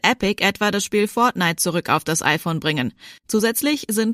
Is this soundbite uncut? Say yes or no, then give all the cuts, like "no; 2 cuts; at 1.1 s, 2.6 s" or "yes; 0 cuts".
no; 1 cut; at 3.2 s